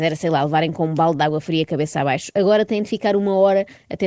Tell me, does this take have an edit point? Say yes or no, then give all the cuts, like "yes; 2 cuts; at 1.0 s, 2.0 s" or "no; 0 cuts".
no; 0 cuts